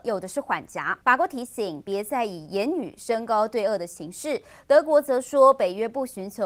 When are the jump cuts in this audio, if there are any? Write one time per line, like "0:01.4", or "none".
0:01.0